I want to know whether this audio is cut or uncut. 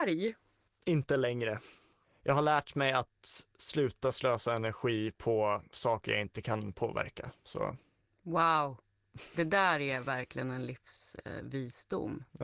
cut